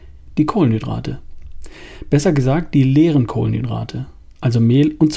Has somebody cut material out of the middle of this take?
no; 0 cuts

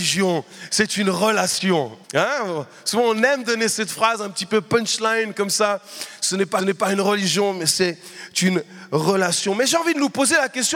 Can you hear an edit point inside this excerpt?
yes; 2 cuts; at 2.0 s, 6.6 s

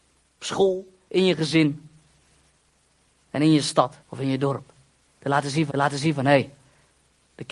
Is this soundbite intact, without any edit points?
no; 2 cuts; at 4.0 s, 5.7 s

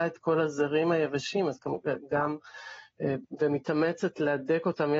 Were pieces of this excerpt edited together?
no; 0 cuts

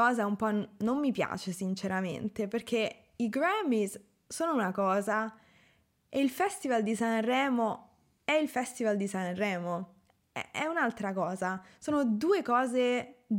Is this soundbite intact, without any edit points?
yes; 0 cuts

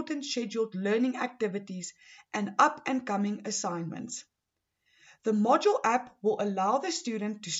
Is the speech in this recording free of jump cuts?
yes; 0 cuts

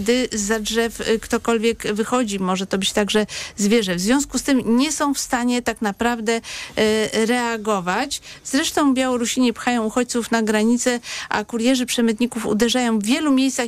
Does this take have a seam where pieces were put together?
no; 0 cuts

